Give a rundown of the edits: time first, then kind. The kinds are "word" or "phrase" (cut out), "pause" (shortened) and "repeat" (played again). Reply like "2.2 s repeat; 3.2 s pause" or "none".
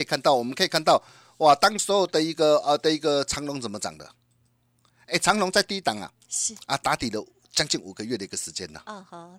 none